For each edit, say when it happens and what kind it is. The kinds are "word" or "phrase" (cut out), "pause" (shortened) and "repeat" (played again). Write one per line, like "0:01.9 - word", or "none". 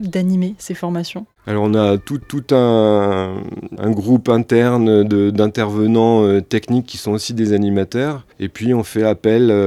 0:02.2 - repeat
0:08.3 - pause